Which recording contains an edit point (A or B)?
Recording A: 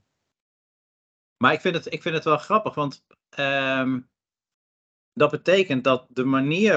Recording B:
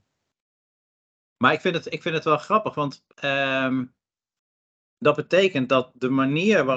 B